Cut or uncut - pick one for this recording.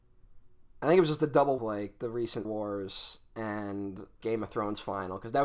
cut